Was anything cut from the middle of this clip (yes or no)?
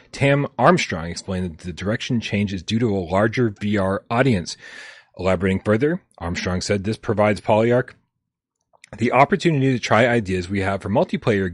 no